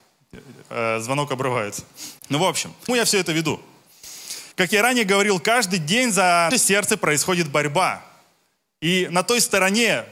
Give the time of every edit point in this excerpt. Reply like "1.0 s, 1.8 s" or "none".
2.2 s, 2.9 s, 4.5 s, 6.5 s